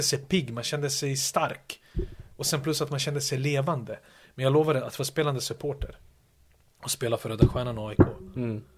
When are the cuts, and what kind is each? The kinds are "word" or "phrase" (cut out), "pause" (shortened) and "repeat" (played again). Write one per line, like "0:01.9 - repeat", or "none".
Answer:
none

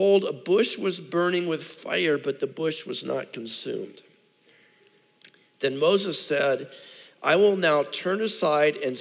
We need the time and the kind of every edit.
none

